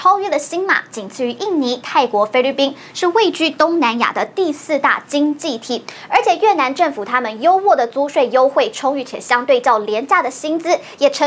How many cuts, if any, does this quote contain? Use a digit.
0